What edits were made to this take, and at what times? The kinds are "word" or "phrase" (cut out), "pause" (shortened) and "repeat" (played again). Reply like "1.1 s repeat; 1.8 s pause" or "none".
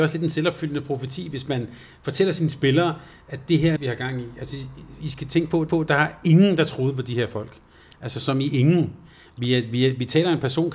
3.8 s phrase; 5.7 s repeat